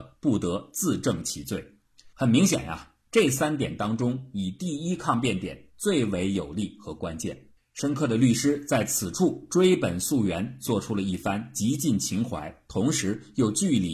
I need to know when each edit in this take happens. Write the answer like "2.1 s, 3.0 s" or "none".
2.1 s, 7.6 s